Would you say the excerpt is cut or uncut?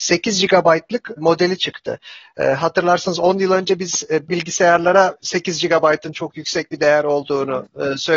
cut